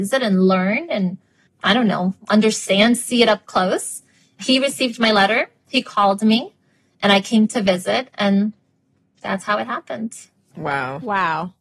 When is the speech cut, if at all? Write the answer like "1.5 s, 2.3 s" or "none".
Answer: 1.5 s